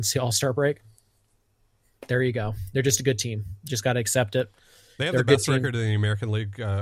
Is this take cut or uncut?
uncut